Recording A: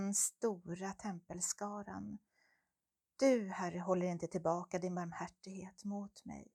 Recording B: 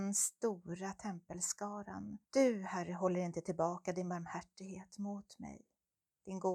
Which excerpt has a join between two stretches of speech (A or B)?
B